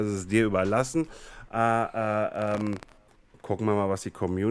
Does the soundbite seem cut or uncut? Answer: uncut